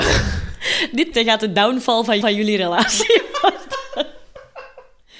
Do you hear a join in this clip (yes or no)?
yes